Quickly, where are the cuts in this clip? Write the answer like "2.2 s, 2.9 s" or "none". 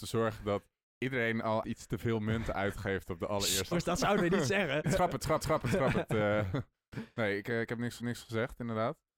1.6 s, 3.7 s, 4.8 s, 5.4 s, 8.0 s